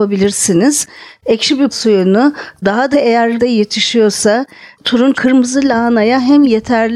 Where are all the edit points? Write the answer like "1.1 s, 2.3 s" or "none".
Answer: 1.7 s, 2.9 s, 3.4 s, 5.1 s